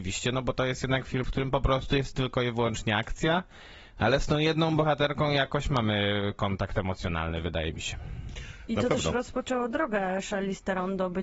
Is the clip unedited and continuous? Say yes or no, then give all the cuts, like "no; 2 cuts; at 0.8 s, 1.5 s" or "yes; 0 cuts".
no; 1 cut; at 1.2 s